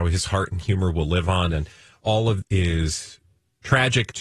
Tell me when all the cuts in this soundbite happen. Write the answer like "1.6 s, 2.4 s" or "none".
2.4 s